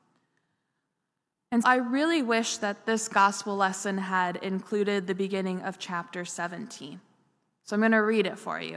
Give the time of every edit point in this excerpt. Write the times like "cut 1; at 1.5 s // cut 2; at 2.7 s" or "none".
cut 1; at 1.6 s